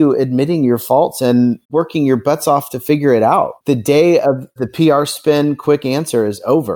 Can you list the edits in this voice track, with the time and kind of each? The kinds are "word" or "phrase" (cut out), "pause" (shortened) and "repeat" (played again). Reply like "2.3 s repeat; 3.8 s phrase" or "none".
1.6 s pause; 3.6 s pause